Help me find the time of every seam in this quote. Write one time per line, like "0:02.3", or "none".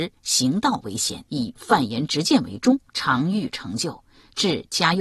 0:01.3
0:02.9